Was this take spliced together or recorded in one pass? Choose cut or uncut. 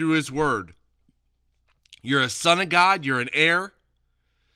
uncut